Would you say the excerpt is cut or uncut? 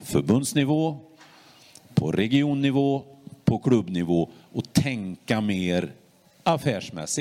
uncut